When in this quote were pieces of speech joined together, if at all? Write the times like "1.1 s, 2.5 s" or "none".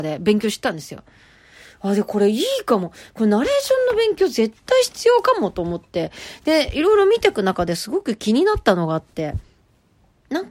none